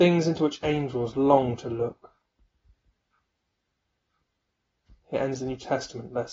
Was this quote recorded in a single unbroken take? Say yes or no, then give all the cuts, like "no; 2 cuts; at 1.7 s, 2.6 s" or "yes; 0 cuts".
yes; 0 cuts